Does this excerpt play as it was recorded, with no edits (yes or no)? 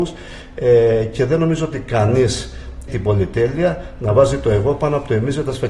no